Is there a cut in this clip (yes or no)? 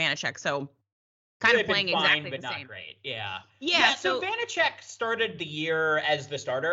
no